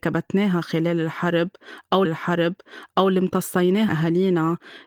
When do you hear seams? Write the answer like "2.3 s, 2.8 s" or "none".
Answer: 2.1 s, 3.9 s